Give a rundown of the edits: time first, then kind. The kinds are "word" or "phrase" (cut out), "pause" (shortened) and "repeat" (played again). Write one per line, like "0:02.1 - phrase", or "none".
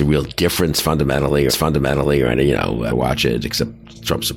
0:01.5 - repeat
0:02.9 - phrase